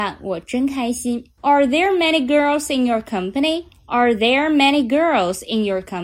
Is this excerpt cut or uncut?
cut